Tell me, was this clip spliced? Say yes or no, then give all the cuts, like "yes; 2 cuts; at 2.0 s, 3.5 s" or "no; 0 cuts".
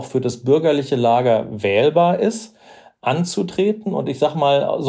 no; 0 cuts